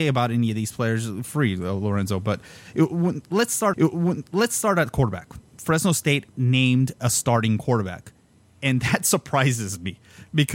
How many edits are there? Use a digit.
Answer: 3